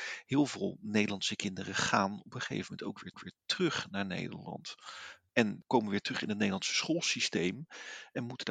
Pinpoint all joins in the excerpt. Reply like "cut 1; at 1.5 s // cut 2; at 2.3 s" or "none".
cut 1; at 3.1 s